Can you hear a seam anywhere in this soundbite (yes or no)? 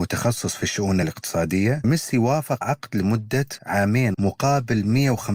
yes